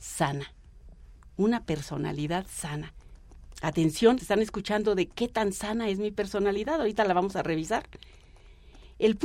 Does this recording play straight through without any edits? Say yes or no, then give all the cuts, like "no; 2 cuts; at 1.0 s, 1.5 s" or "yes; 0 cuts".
no; 1 cut; at 4.2 s